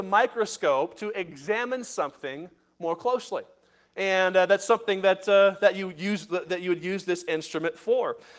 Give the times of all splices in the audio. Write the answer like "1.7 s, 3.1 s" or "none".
none